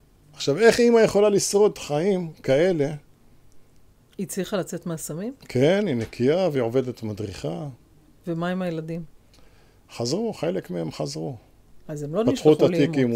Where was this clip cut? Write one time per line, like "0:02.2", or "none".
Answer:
none